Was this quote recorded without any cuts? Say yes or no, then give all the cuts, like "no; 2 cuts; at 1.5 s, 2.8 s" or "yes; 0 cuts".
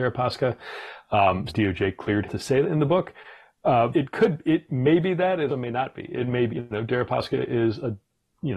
no; 6 cuts; at 1.5 s, 2.2 s, 2.6 s, 3.9 s, 5.5 s, 6.5 s